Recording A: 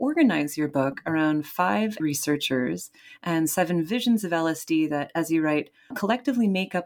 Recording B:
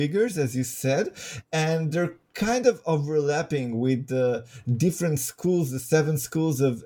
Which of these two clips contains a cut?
A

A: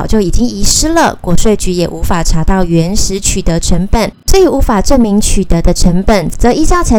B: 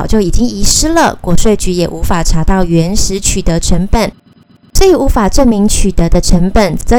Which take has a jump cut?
A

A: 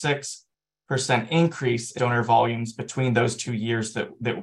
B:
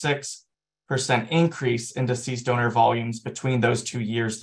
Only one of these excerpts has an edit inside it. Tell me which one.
A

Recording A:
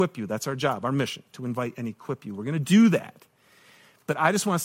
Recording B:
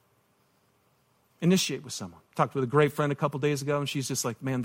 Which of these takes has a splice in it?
B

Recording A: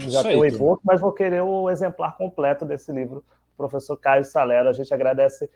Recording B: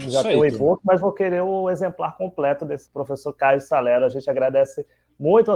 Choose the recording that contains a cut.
B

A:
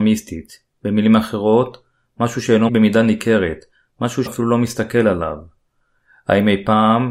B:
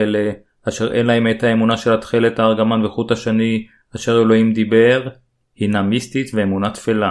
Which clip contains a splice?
A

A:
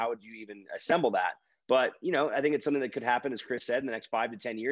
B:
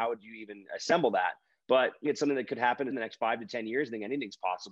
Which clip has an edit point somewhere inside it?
B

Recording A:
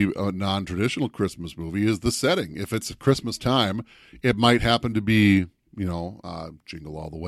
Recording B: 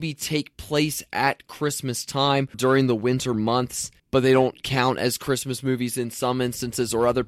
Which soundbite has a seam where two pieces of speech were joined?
B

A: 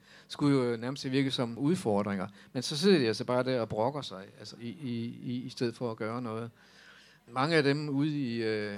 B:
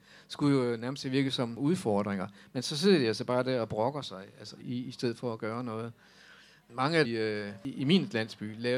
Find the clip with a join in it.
B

